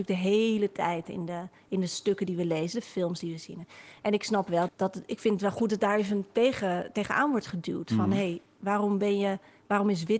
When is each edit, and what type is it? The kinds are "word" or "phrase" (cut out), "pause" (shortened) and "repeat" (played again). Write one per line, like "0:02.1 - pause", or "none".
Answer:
0:04.7 - word